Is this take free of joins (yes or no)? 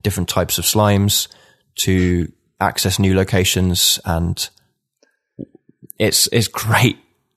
yes